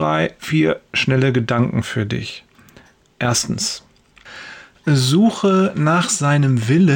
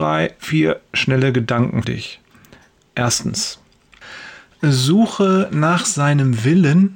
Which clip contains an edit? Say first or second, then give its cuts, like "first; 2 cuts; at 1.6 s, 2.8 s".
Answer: second; 1 cut; at 1.8 s